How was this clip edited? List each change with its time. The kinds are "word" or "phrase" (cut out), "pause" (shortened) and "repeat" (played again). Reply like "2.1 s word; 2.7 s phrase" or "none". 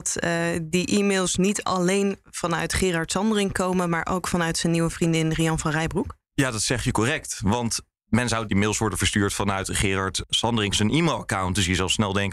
6.2 s pause; 8.5 s phrase; 10.7 s word